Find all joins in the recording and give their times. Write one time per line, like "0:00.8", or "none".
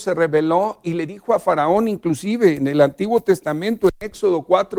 none